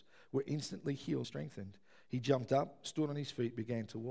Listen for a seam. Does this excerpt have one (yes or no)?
yes